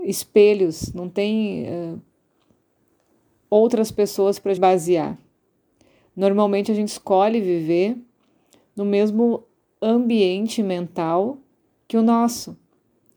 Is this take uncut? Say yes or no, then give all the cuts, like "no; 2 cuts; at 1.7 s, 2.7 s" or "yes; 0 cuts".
no; 1 cut; at 4.6 s